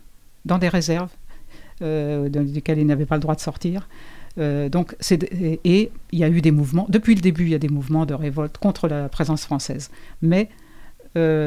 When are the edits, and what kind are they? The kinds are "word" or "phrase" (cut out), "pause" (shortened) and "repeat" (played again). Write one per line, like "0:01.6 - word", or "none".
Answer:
none